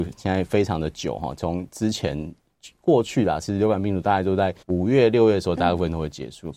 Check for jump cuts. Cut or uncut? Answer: cut